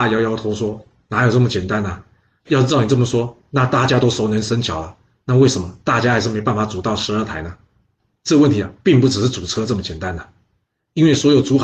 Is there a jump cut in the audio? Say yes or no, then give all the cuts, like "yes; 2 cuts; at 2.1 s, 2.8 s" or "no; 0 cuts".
no; 0 cuts